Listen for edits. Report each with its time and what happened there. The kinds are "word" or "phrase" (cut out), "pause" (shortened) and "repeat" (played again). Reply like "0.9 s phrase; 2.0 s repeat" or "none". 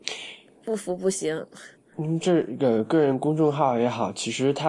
1.8 s pause